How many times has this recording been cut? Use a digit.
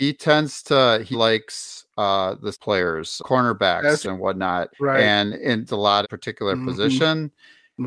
7